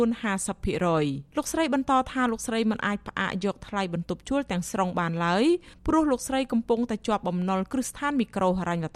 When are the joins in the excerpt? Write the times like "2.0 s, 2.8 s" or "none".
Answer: 1.3 s

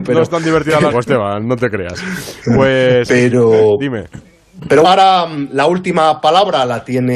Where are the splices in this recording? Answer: 0.9 s, 4.8 s

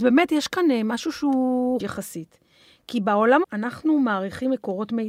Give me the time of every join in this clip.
1.8 s, 3.4 s

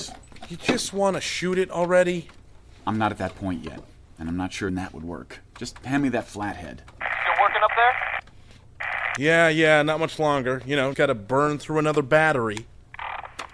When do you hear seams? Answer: 4.7 s, 10.9 s

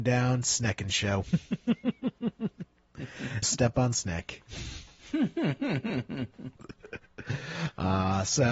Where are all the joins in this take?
3.4 s

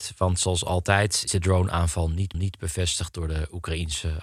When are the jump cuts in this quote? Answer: 1.3 s, 2.3 s

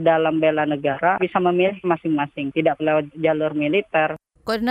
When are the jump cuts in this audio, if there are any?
1.2 s, 1.8 s, 2.8 s, 3.1 s

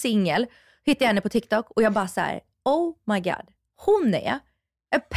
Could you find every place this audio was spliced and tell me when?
none

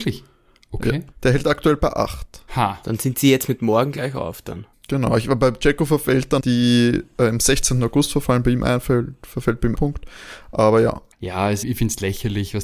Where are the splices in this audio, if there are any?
1.1 s, 2.5 s, 4.7 s, 6.4 s, 9.7 s, 11.1 s, 11.6 s

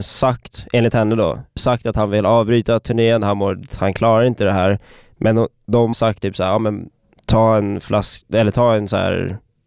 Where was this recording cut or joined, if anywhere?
1.6 s, 3.7 s, 5.9 s

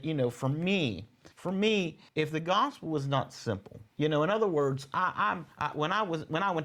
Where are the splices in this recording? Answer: 1.3 s, 2.1 s, 3.9 s, 5.5 s

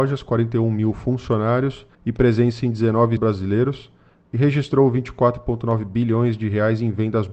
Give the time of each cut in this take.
1.9 s, 3.2 s

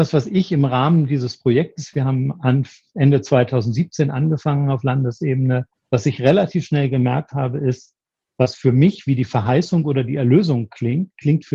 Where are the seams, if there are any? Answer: 5.7 s

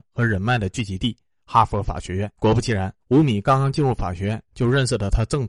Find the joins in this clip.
2.4 s, 3.0 s

